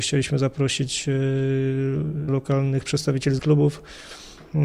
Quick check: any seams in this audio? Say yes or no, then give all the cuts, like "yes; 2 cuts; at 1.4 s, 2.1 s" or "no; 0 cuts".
yes; 2 cuts; at 2.3 s, 3.4 s